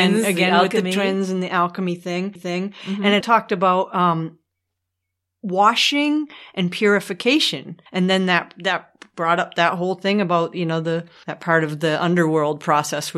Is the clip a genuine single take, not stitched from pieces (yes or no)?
no